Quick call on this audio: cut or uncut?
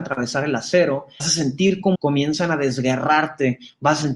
cut